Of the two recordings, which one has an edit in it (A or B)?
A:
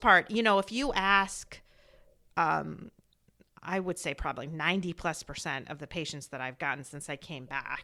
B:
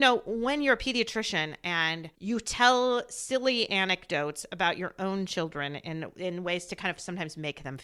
B